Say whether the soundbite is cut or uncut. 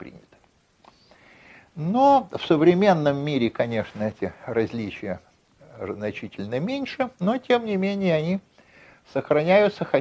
uncut